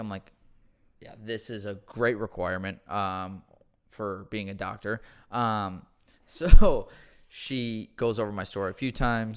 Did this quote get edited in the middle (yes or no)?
no